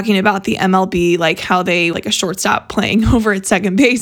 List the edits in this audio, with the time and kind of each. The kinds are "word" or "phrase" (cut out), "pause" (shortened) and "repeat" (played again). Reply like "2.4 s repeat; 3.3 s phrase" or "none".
1.9 s phrase